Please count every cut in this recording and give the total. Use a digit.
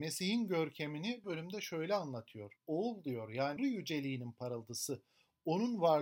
3